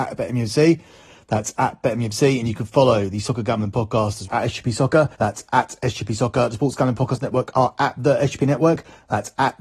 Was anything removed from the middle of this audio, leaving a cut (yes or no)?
yes